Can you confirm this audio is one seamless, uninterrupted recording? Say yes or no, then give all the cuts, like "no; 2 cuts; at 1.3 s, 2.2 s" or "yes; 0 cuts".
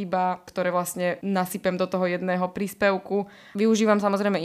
yes; 0 cuts